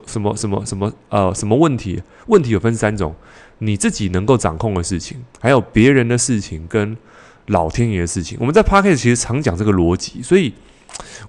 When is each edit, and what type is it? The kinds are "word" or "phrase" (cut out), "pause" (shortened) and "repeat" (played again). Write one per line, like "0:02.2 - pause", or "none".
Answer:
0:05.3 - pause